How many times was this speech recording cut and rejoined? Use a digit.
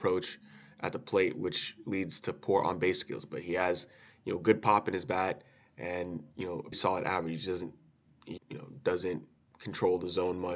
2